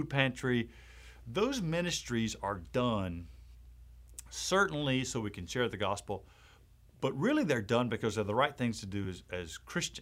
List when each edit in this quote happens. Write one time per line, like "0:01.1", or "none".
none